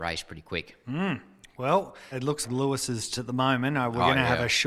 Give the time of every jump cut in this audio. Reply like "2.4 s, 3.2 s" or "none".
2.1 s, 2.4 s, 3.2 s